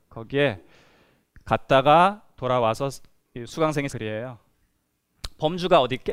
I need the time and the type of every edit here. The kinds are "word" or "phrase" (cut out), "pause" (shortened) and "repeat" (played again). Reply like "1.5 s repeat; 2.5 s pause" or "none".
3.9 s word